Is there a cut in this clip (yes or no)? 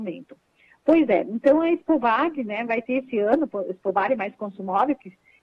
no